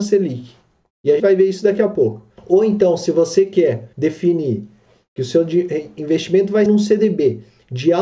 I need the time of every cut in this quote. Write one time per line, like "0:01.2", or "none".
0:01.2
0:02.4
0:03.9
0:06.7